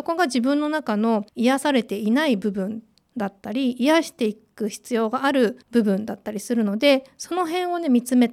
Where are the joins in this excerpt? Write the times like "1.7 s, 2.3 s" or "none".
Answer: 1.3 s, 5.6 s